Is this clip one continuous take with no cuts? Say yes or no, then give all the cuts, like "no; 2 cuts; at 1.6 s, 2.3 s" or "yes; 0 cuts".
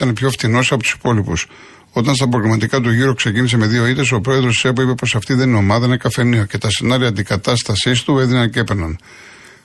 yes; 0 cuts